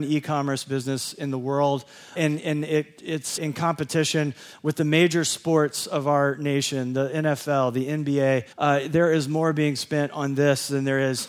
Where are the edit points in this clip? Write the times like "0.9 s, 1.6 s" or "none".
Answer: 2.2 s, 3.4 s, 8.5 s